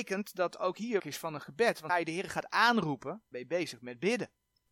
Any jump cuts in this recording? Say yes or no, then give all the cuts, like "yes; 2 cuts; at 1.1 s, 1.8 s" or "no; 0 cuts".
yes; 3 cuts; at 1.0 s, 1.9 s, 3.3 s